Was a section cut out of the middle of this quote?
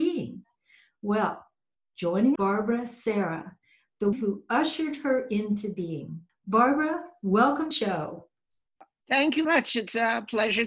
yes; 5 cuts; at 2.4 s, 4.1 s, 6.3 s, 7.7 s, 9.4 s

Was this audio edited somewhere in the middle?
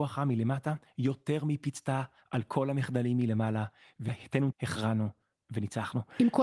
yes; 1 cut; at 4.5 s

